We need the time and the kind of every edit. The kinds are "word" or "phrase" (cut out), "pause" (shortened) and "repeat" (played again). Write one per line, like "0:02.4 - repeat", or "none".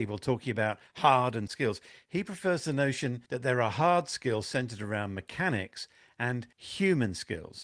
0:01.5 - word
0:03.3 - pause
0:06.5 - pause